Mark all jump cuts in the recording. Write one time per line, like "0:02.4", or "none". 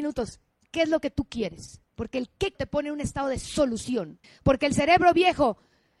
0:01.9
0:02.5
0:04.2